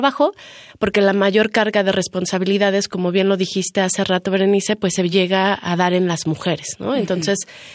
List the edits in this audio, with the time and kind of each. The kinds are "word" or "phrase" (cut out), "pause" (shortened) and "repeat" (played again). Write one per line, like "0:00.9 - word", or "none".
none

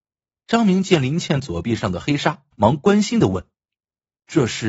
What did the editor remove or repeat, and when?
0:02.5 - pause
0:03.5 - pause

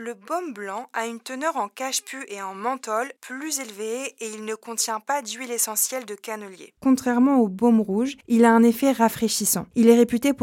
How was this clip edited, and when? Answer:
0:06.8 - pause

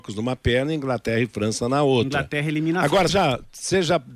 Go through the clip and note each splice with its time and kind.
0:03.1 - word

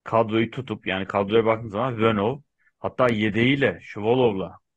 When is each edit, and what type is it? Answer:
none

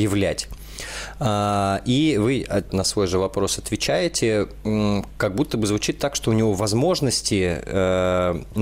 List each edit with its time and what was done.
0:02.7 - phrase

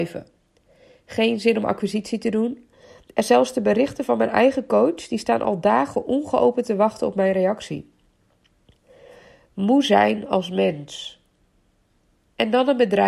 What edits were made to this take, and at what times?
none

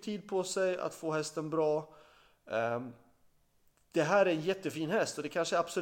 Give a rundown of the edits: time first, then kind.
none

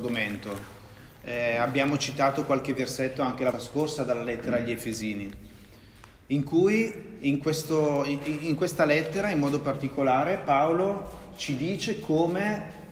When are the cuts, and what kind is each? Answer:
0:03.5 - word

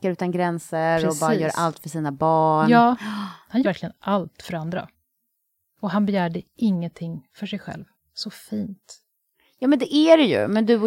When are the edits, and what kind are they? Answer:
0:03.6 - word

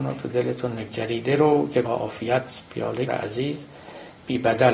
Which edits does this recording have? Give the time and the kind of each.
0:01.8 - word
0:02.5 - word
0:03.1 - phrase

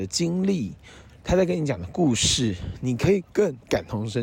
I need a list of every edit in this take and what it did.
0:03.3 - pause

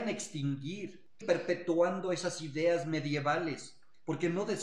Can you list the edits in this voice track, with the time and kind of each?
0:01.2 - word

